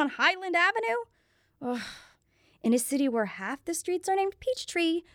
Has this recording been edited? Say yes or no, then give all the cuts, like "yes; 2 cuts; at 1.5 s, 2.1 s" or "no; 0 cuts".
no; 0 cuts